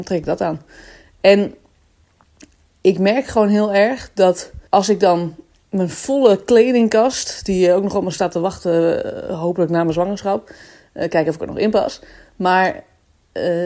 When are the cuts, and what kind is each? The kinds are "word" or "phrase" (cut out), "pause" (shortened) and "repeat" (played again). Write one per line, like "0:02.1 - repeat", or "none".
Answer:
0:04.7 - pause